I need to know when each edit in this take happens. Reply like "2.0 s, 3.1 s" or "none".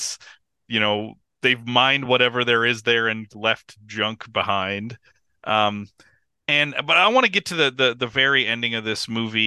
none